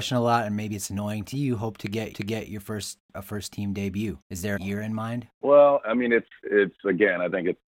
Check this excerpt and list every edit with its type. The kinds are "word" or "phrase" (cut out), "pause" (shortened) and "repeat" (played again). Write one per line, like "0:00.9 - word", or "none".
0:01.3 - phrase
0:02.1 - repeat
0:03.1 - phrase
0:04.2 - pause
0:04.6 - phrase
0:05.3 - pause